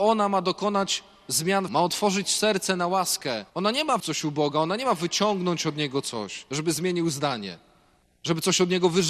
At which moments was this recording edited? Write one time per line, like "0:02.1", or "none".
0:01.7
0:03.5
0:04.0